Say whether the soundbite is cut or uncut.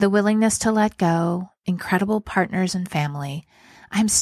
uncut